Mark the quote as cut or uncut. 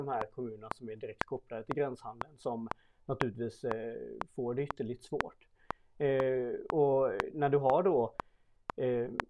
uncut